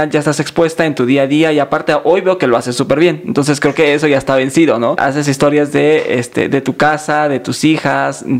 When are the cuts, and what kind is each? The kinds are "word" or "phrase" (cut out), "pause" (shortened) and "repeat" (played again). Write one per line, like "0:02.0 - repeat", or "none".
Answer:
none